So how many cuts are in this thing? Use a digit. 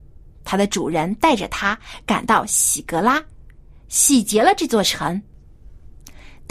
0